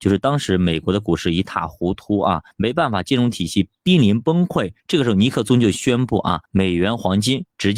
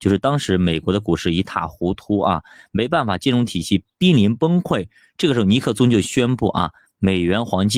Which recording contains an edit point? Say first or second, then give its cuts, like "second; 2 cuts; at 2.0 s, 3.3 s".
first; 3 cuts; at 2.5 s, 4.8 s, 6.4 s